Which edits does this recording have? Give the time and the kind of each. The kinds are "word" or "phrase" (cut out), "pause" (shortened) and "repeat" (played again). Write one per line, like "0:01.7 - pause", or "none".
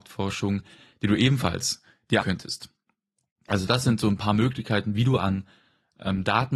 0:02.2 - word